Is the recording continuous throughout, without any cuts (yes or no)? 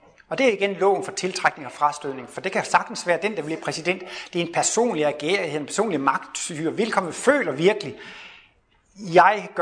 yes